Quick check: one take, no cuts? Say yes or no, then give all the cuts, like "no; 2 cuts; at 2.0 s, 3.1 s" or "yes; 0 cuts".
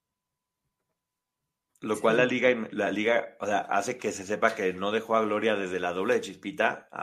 yes; 0 cuts